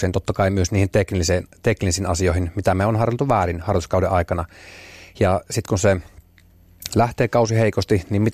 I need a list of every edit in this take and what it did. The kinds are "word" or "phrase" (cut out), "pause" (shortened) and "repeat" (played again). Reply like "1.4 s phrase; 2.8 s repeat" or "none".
none

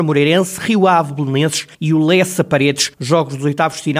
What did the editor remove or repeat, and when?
1.7 s pause; 2.9 s pause

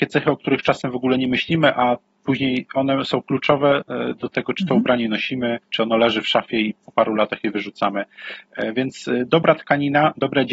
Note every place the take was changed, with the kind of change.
5.6 s pause; 6.8 s word

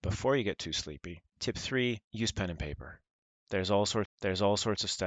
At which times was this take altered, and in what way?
1.3 s pause; 2.0 s pause; 4.1 s repeat

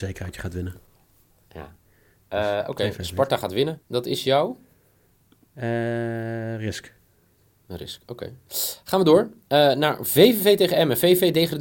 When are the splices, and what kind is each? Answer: 3.8 s pause

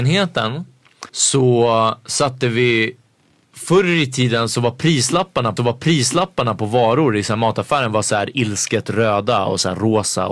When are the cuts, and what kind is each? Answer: 1.1 s pause; 5.6 s repeat

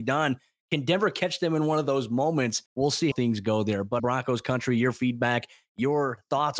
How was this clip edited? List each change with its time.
2.7 s pause; 3.1 s word; 4.0 s word

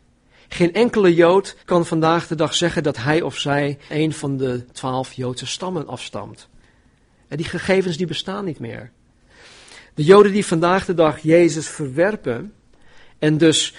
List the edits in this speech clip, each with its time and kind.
1.6 s pause; 3.9 s word

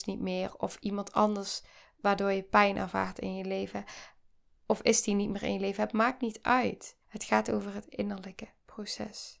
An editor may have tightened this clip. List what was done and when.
7.0 s pause

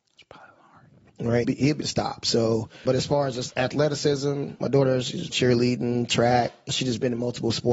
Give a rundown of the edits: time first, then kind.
1.4 s word; 1.8 s word; 2.8 s word; 3.5 s word; 4.6 s word; 5.3 s word; 6.7 s word

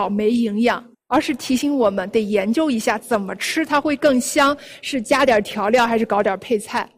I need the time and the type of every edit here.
0.9 s pause

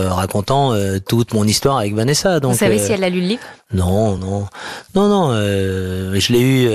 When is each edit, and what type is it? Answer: none

